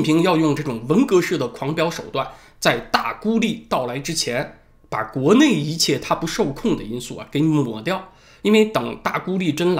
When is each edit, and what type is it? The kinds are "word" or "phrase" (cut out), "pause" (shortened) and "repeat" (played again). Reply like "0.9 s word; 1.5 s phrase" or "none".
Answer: none